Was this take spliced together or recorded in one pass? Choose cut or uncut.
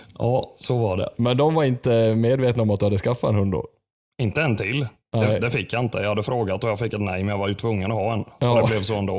uncut